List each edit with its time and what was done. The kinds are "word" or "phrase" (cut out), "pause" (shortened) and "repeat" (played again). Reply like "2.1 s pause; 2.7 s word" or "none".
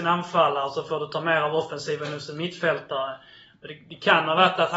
none